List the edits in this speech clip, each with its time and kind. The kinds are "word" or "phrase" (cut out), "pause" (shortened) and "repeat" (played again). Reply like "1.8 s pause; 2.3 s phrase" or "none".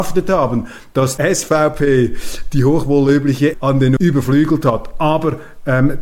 1.2 s word; 3.5 s word; 4.0 s word